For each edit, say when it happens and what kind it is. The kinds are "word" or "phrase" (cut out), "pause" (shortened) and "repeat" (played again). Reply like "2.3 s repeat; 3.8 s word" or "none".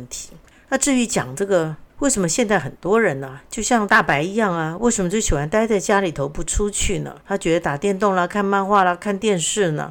1.9 s pause; 7.2 s pause